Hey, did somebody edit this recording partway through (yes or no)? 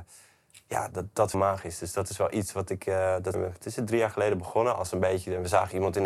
yes